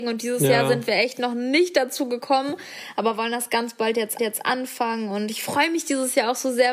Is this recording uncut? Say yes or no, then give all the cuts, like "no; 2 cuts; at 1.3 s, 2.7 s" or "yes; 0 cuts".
no; 1 cut; at 4.2 s